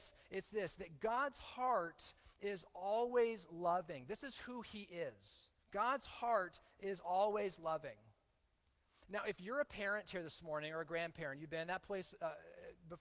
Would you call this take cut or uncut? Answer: cut